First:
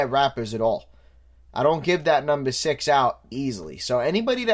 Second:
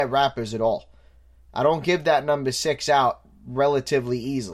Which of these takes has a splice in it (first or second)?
first